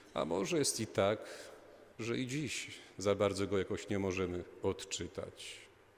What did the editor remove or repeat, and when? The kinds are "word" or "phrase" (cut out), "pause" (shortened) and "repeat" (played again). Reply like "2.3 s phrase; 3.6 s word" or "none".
1.9 s pause